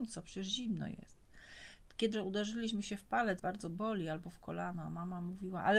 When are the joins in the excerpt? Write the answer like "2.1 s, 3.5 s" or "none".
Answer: 2.1 s, 3.4 s